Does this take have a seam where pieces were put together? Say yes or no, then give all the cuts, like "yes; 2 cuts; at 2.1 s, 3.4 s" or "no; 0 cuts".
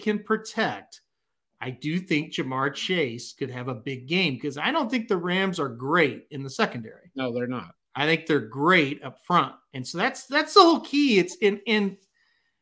no; 0 cuts